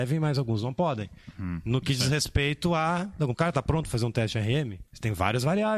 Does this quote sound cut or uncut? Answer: cut